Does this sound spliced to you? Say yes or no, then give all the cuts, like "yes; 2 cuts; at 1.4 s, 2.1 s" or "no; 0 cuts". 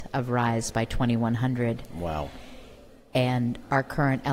no; 0 cuts